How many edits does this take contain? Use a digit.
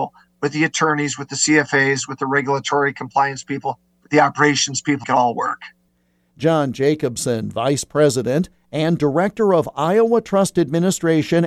1